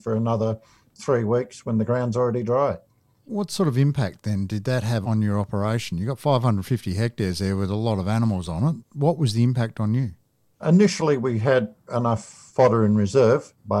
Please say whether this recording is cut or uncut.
uncut